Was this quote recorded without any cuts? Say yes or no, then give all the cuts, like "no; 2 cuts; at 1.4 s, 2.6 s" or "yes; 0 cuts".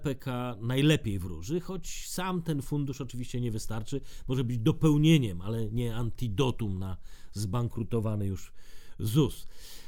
yes; 0 cuts